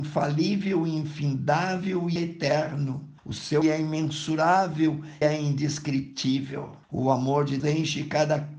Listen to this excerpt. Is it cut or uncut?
cut